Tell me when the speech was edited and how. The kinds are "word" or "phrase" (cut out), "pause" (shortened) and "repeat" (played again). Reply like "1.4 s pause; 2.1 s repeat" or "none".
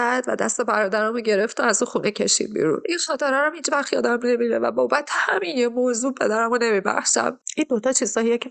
none